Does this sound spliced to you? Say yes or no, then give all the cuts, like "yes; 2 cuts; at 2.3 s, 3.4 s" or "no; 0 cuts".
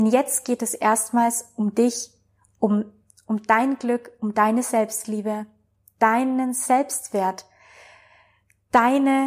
no; 0 cuts